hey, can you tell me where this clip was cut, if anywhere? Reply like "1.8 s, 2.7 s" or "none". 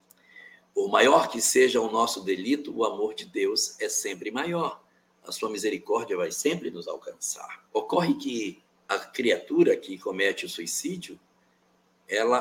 7.7 s, 8.7 s